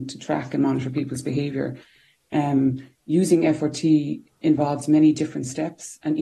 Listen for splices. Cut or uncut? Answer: uncut